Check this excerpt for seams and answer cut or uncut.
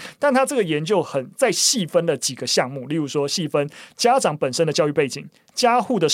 uncut